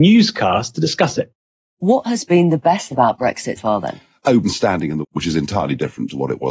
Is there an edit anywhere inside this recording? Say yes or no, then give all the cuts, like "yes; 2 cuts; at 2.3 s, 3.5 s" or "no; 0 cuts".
yes; 4 cuts; at 2.9 s, 3.6 s, 4.4 s, 5.0 s